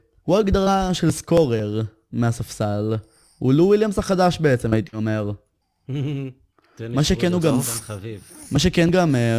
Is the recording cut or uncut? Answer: uncut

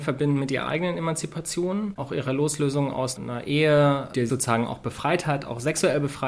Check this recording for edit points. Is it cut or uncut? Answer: cut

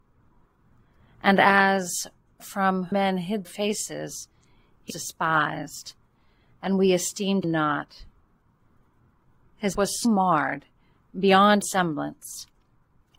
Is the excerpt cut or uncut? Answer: cut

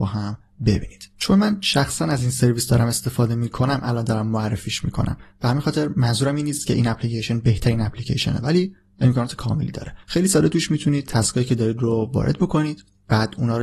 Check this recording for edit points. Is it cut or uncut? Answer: cut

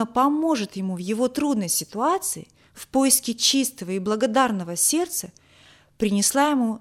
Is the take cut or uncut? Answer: uncut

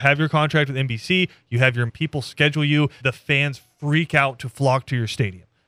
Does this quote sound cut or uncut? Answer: cut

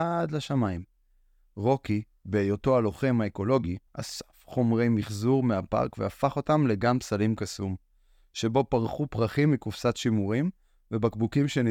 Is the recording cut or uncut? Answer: cut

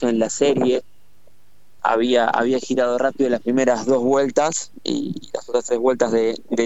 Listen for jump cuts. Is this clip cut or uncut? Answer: cut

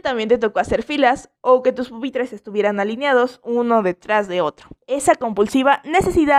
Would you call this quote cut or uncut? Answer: cut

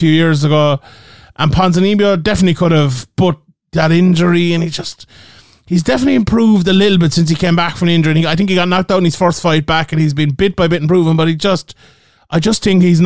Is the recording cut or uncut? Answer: uncut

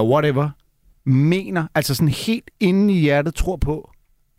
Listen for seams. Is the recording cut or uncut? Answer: uncut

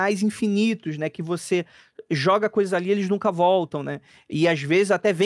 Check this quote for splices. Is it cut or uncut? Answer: uncut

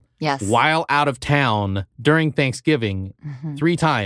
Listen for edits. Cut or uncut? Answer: uncut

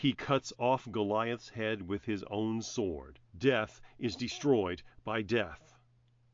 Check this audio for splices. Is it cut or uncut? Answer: cut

